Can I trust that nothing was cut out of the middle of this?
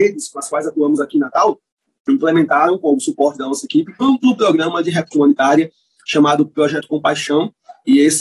no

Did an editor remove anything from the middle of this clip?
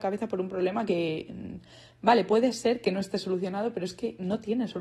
no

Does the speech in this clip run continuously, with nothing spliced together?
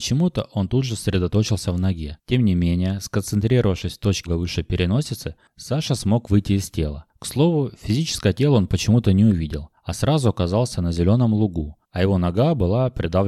no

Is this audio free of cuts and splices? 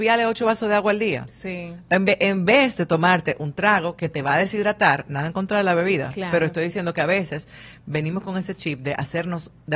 yes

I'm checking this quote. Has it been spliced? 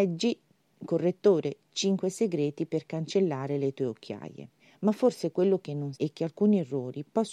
yes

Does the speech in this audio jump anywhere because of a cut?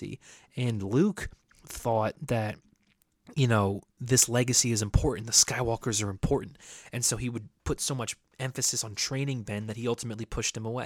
no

